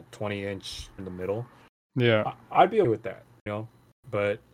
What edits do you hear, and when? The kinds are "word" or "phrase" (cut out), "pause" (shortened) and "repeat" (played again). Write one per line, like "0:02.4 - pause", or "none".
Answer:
0:01.0 - word
0:02.8 - word
0:03.5 - word